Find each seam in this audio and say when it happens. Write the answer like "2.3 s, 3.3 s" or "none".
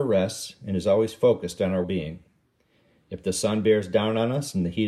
1.8 s